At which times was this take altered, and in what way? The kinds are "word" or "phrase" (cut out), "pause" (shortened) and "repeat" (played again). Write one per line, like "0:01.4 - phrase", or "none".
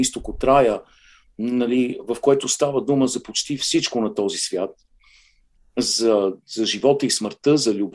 none